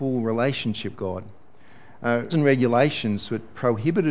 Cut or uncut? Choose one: cut